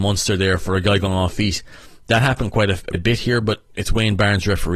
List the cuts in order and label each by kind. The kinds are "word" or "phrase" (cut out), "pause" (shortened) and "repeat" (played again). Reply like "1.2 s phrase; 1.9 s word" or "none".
1.3 s word; 2.9 s word